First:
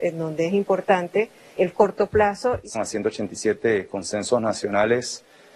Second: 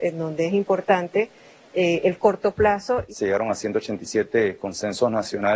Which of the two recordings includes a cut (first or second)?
first